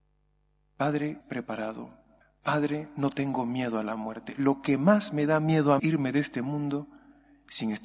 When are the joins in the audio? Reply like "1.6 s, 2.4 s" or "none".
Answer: 1.2 s, 2.2 s, 5.8 s